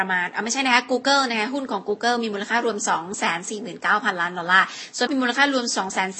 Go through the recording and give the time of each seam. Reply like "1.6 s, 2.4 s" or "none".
5.1 s